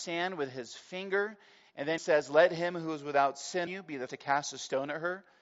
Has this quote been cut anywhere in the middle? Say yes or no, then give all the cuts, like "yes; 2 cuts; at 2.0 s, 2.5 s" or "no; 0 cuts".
yes; 3 cuts; at 2.0 s, 3.7 s, 4.1 s